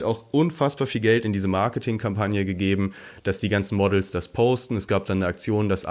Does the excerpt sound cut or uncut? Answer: uncut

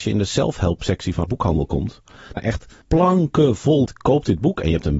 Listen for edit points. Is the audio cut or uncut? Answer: cut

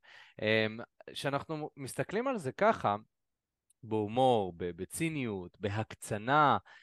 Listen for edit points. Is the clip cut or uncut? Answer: uncut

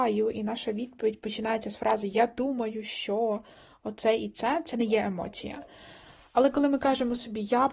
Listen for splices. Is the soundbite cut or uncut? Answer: uncut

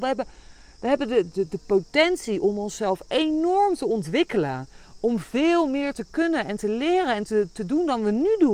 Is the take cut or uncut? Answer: cut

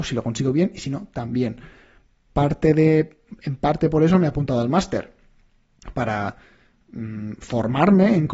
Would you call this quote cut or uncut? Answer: uncut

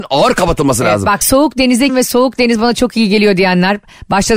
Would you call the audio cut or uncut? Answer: cut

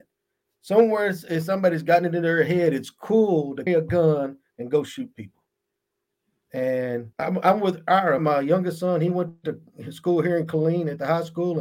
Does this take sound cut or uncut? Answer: cut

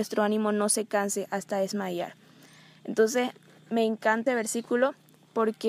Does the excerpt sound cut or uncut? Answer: cut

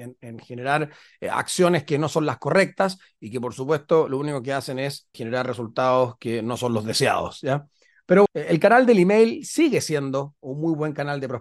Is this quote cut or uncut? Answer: cut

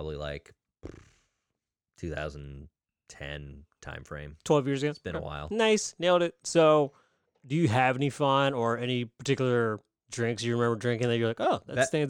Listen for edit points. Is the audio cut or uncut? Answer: uncut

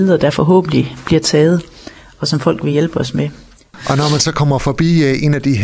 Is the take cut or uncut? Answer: uncut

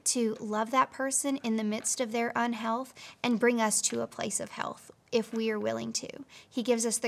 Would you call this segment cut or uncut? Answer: uncut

